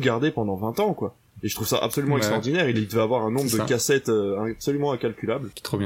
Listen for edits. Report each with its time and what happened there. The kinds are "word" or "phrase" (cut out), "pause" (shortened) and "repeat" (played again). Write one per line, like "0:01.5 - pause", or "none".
none